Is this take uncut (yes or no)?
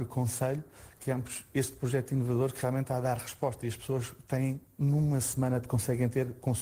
yes